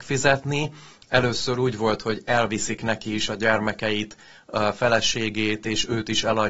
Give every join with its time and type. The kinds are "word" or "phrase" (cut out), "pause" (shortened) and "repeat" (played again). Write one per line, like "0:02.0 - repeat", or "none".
none